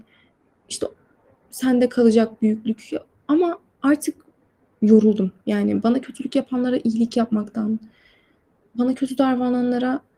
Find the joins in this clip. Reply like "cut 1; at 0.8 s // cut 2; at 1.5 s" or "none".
none